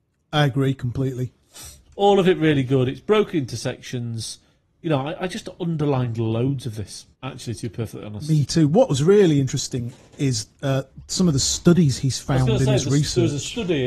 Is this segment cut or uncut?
cut